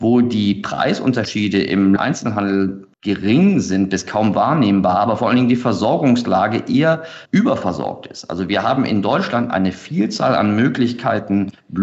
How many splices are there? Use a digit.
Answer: 3